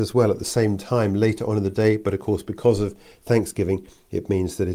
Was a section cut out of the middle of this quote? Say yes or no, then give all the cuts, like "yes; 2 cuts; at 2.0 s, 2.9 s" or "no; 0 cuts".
no; 0 cuts